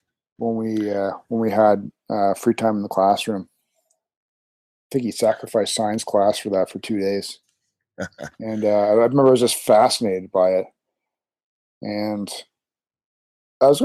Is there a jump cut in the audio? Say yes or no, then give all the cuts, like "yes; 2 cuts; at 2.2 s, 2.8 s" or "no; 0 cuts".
no; 0 cuts